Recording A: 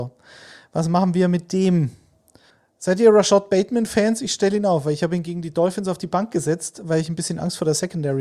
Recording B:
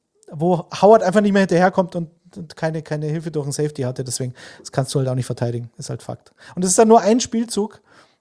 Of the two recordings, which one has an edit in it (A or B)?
A